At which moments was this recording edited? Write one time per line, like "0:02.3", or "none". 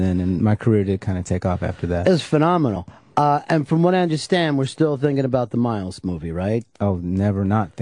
none